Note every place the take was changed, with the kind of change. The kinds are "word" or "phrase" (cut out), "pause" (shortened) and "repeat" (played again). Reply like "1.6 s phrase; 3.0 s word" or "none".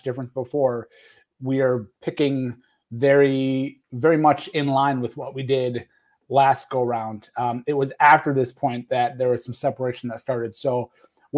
none